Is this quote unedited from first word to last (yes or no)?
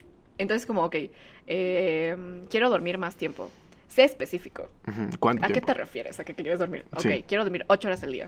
yes